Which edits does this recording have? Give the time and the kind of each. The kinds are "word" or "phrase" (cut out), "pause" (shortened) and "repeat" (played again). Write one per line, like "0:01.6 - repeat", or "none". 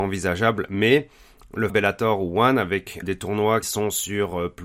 0:01.7 - word
0:03.0 - word
0:03.6 - word